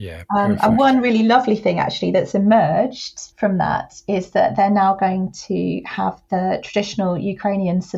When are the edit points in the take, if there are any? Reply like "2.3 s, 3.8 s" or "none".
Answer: 3.3 s